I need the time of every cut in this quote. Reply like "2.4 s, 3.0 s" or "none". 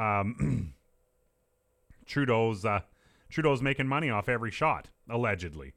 none